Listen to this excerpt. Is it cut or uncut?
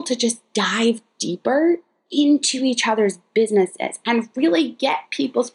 uncut